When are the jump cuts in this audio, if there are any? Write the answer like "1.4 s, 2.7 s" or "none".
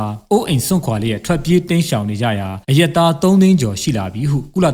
2.6 s